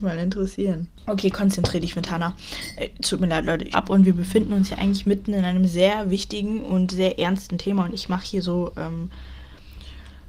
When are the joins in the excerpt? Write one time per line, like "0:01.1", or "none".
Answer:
0:03.7